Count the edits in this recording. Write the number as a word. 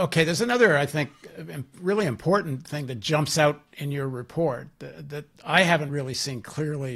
zero